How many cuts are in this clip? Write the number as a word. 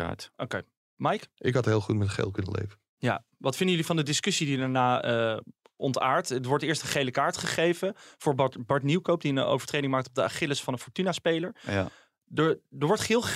zero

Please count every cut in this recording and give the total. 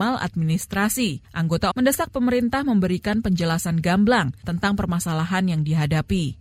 one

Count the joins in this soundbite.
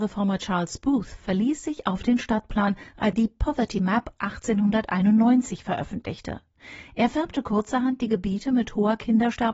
one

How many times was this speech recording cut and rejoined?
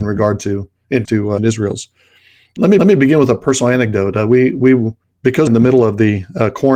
four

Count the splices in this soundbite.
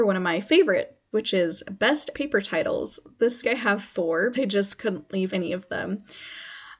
five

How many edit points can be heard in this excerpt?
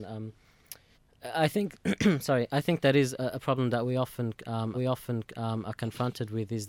two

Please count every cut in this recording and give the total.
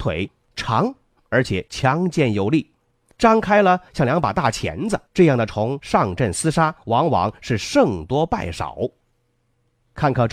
one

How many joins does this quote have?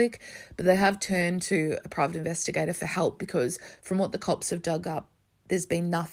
zero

